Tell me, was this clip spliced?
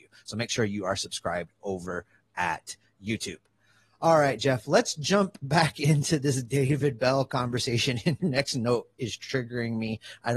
yes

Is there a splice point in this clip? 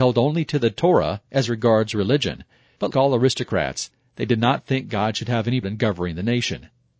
yes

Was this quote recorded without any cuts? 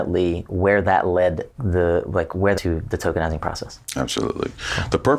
no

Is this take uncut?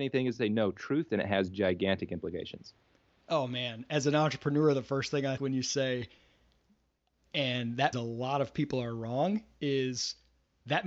no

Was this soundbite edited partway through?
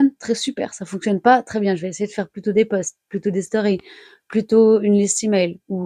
no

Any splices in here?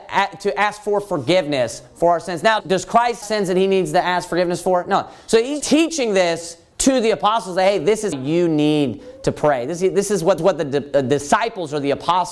yes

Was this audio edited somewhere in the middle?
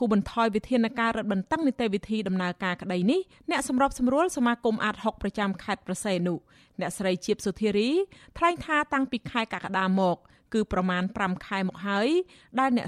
no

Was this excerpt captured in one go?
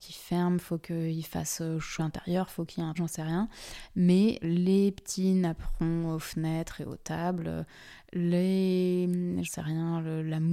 no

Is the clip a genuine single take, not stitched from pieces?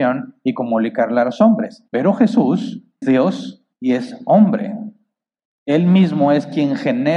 no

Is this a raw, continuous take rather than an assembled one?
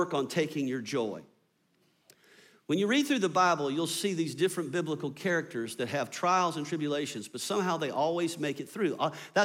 yes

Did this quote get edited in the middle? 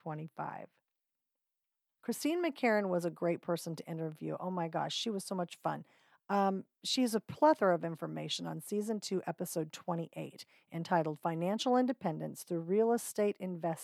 no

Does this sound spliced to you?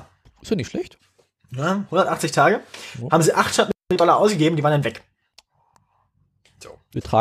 no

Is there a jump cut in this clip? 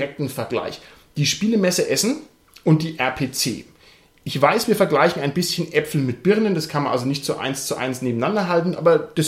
no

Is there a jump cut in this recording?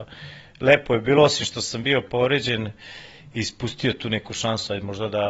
no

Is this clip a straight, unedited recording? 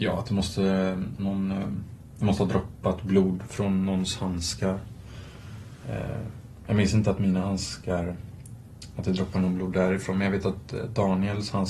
yes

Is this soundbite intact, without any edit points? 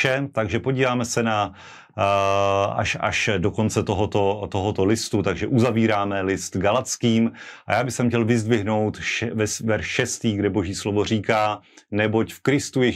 yes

